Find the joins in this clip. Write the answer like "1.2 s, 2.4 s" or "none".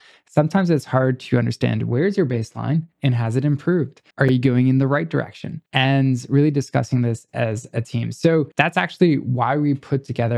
2.9 s, 4.1 s, 5.7 s, 8.5 s